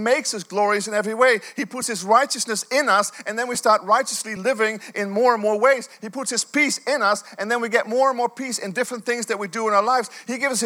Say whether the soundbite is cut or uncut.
uncut